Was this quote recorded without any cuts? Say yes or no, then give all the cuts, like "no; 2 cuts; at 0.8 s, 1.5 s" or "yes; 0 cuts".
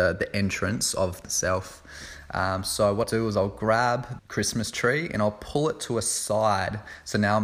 no; 3 cuts; at 1.2 s, 3.0 s, 4.2 s